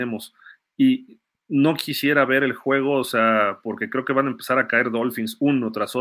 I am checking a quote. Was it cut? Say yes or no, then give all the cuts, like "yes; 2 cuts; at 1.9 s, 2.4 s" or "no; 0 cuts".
no; 0 cuts